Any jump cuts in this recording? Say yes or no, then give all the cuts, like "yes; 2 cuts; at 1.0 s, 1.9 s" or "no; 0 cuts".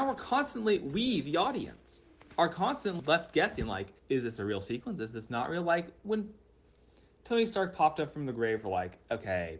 yes; 2 cuts; at 3.0 s, 4.0 s